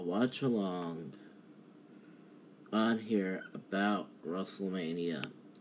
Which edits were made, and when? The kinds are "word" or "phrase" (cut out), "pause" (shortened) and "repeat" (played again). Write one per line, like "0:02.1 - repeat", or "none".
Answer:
none